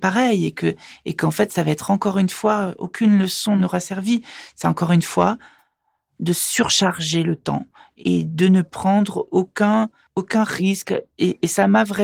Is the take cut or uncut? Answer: uncut